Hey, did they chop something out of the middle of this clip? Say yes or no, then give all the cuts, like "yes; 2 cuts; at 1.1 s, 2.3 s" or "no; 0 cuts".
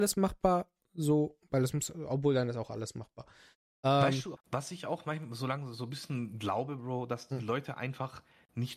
yes; 1 cut; at 4.4 s